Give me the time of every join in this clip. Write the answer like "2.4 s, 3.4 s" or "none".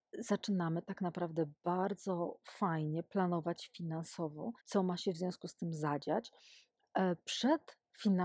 4.6 s